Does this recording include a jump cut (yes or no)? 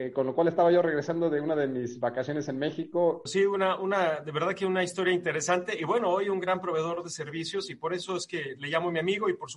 no